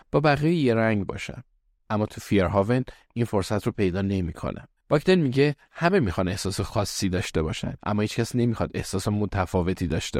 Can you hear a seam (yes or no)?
yes